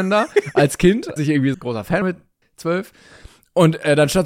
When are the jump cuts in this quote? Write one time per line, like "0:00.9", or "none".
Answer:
0:01.2
0:01.5
0:02.0
0:02.4